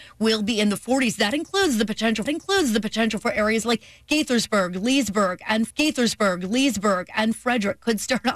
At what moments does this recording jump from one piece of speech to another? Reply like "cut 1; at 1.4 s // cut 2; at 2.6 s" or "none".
cut 1; at 2.3 s // cut 2; at 5.7 s